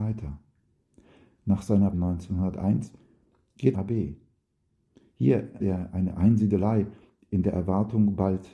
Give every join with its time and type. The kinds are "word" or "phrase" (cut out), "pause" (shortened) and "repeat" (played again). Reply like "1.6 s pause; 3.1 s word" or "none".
1.9 s word; 3.7 s phrase; 5.6 s word